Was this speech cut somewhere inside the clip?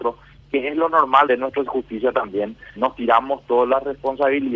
yes; 4 cuts; at 1.3 s, 1.7 s, 2.8 s, 3.5 s

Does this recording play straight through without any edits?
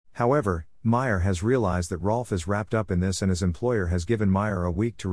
yes; 0 cuts

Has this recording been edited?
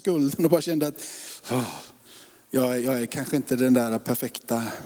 no; 0 cuts

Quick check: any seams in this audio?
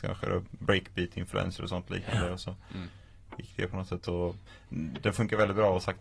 no; 0 cuts

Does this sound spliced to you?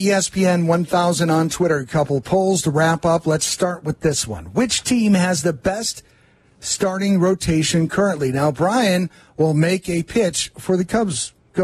no; 0 cuts

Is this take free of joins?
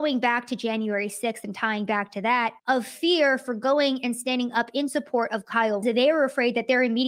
no; 2 cuts; at 2.6 s, 5.8 s

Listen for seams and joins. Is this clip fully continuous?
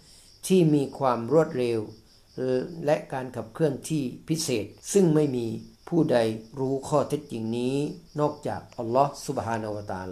no; 3 cuts; at 4.8 s, 5.8 s, 8.1 s

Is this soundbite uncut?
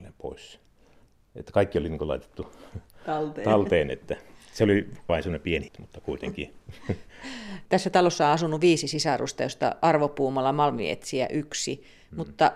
no; 3 cuts; at 5.1 s, 5.7 s, 7.7 s

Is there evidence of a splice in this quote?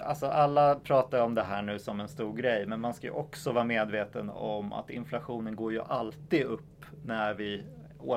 no; 0 cuts

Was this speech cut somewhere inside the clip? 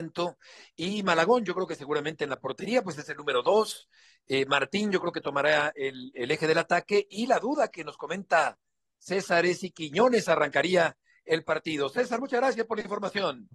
no; 0 cuts

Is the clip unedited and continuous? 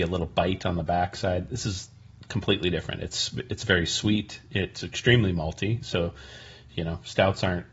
yes; 0 cuts

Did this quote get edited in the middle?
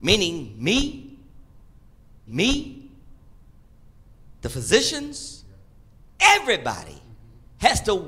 yes; 1 cut; at 2.3 s

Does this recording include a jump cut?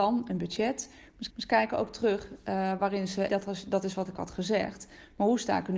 yes; 2 cuts; at 1.3 s, 3.3 s

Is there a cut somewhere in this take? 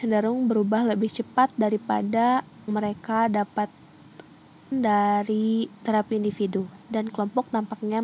yes; 2 cuts; at 2.7 s, 4.7 s

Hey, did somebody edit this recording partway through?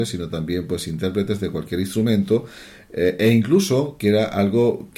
no; 0 cuts

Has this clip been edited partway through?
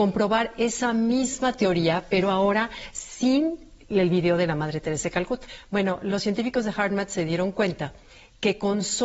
no; 0 cuts

